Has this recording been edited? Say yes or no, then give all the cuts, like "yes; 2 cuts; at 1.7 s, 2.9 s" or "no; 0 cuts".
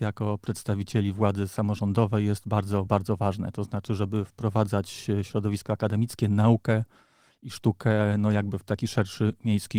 no; 0 cuts